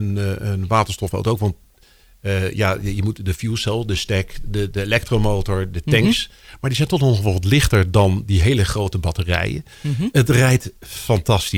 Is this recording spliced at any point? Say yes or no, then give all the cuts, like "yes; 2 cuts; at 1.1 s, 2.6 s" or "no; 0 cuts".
no; 0 cuts